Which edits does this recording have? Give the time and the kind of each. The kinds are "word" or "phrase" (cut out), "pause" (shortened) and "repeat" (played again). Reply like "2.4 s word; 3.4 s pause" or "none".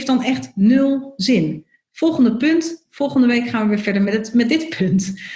none